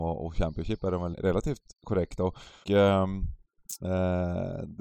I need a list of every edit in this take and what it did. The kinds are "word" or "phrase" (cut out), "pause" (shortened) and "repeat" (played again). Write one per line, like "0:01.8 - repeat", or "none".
0:01.1 - word
0:01.7 - pause
0:02.6 - word